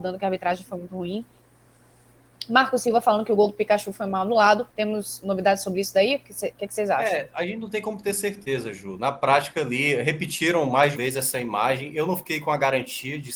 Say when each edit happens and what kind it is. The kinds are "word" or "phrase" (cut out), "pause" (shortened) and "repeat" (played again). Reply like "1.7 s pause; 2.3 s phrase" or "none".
4.7 s pause; 10.9 s word